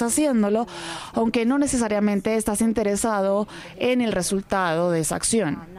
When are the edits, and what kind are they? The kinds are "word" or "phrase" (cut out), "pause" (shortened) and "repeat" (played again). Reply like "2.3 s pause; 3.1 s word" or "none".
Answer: none